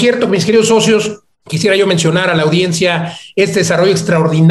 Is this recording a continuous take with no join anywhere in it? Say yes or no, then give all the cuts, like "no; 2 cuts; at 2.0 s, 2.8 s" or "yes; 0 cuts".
yes; 0 cuts